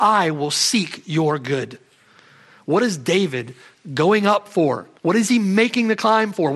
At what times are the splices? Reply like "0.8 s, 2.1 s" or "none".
5.0 s